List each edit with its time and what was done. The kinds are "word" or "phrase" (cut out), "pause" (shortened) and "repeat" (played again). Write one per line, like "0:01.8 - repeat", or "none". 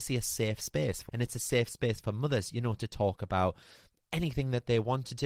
0:01.1 - word